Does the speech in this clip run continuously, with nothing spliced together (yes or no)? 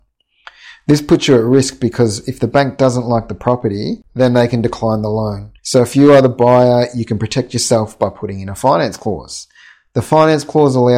no